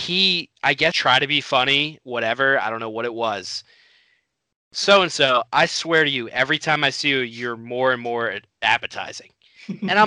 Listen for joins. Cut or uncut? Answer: cut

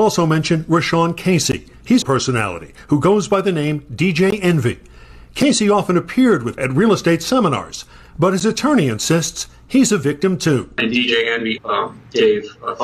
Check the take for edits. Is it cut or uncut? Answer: cut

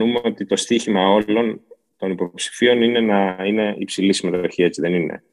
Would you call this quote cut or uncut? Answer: uncut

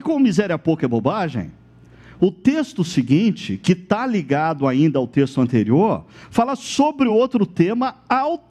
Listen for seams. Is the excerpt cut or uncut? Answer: uncut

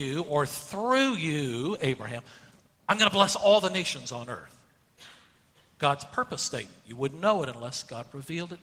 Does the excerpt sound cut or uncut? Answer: uncut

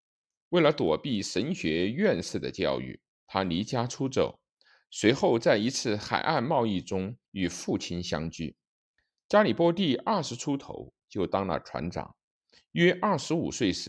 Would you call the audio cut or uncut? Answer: cut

